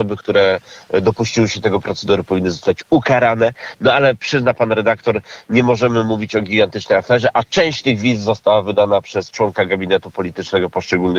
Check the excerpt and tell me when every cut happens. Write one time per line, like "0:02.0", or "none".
none